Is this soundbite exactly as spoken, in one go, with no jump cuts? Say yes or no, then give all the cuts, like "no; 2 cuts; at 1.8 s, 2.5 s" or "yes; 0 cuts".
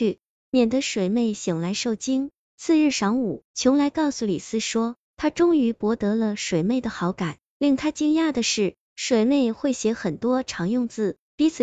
no; 1 cut; at 3.5 s